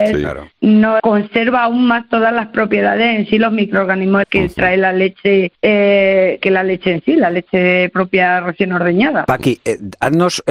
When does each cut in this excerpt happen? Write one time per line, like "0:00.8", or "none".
0:01.0
0:04.2
0:05.5